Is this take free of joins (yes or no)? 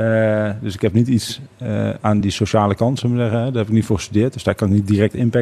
yes